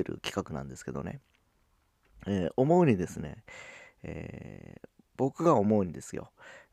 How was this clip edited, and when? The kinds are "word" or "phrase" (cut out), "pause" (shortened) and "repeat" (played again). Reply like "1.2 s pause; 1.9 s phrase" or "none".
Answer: none